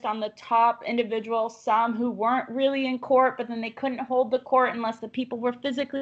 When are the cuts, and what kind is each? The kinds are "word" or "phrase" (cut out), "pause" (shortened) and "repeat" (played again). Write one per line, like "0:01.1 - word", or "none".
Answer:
none